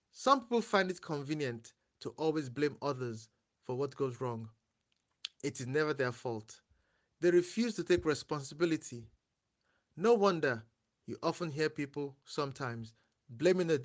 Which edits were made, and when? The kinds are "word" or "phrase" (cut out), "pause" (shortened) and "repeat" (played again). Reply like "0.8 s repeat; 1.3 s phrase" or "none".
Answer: none